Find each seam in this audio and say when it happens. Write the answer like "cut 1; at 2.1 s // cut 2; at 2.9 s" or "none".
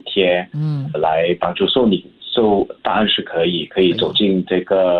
cut 1; at 0.9 s

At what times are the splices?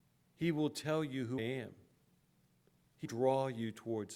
cut 1; at 1.4 s // cut 2; at 3.0 s

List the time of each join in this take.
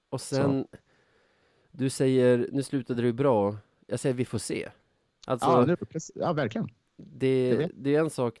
none

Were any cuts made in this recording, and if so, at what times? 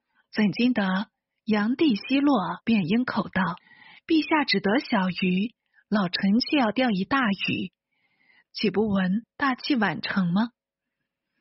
cut 1; at 2.6 s // cut 2; at 3.6 s

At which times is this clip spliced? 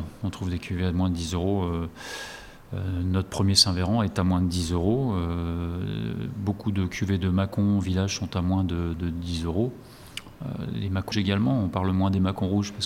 cut 1; at 11.1 s

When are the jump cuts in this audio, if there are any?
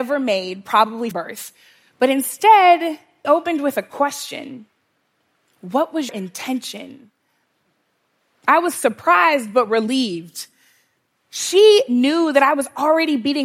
cut 1; at 1.1 s // cut 2; at 3.2 s // cut 3; at 6.1 s

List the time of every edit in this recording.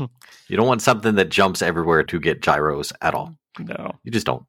cut 1; at 2.1 s

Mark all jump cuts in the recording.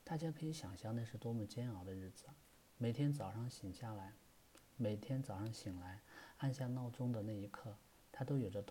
cut 1; at 4.7 s

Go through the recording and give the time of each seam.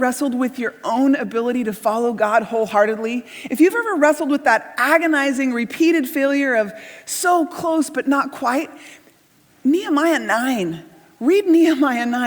none

